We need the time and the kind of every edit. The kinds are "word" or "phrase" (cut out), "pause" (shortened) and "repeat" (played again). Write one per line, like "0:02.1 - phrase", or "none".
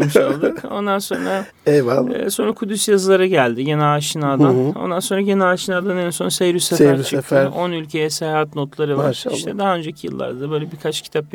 none